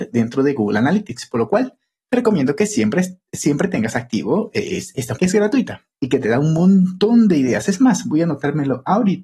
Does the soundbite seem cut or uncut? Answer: cut